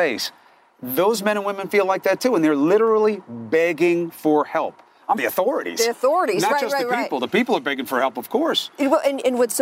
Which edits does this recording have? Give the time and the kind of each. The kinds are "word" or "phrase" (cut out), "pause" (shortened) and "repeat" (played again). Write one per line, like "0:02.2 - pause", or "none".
0:05.2 - phrase